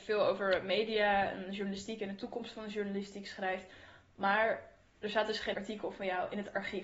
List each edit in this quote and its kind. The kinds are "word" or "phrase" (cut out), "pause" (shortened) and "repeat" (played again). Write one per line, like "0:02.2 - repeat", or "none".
0:05.5 - word